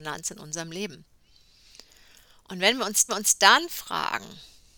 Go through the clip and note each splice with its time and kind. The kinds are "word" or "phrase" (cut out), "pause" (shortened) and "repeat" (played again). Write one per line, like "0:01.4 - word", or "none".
0:03.1 - repeat